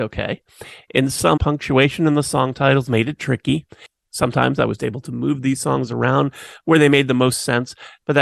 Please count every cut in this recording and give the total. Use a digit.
1